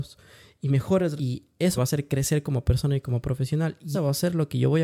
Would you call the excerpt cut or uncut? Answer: cut